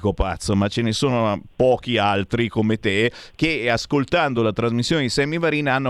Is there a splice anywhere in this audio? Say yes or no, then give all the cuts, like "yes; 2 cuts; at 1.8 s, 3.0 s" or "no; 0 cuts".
no; 0 cuts